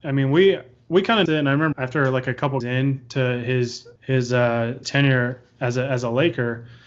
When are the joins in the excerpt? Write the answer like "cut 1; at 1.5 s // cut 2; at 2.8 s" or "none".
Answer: cut 1; at 1.3 s // cut 2; at 1.7 s // cut 3; at 2.6 s // cut 4; at 4.0 s // cut 5; at 4.8 s